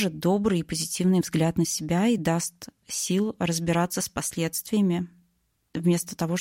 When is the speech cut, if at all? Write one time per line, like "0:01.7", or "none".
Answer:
none

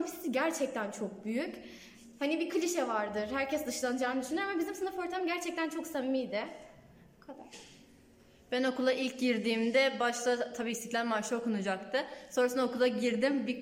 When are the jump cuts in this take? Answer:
none

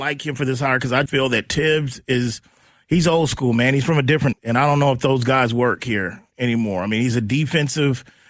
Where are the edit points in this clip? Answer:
0:01.1
0:04.3

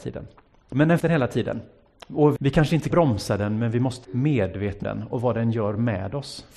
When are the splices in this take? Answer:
0:01.0
0:02.4
0:02.9
0:04.0
0:04.8

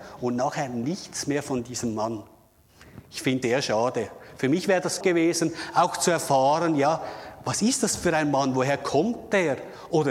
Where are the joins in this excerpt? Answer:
0:03.4
0:05.0

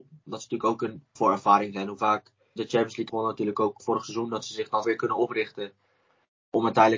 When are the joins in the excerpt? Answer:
0:01.2
0:02.6
0:03.1
0:03.8
0:04.8

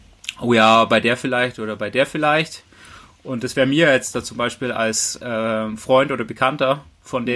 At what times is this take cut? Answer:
none

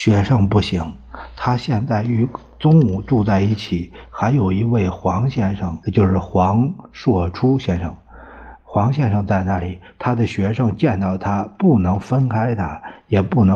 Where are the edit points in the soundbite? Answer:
0:05.8

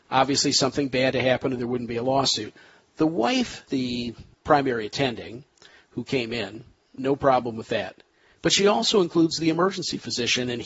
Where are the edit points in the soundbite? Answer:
0:01.1
0:03.7

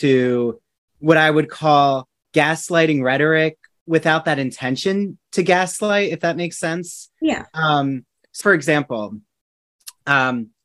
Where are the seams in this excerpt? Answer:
0:08.4

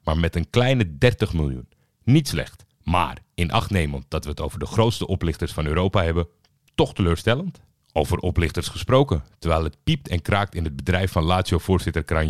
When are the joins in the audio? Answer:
0:02.7

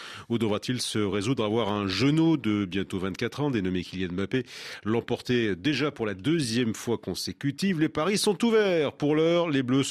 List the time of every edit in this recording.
none

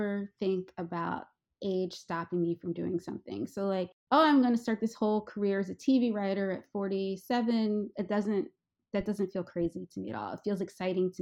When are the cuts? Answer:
none

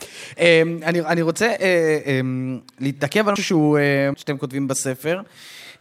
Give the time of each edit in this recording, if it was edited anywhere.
0:03.4
0:04.1

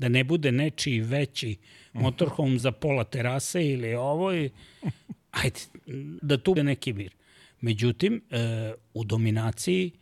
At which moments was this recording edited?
0:02.6
0:06.2
0:06.6

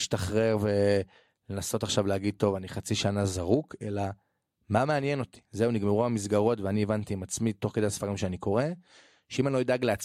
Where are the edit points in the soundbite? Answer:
none

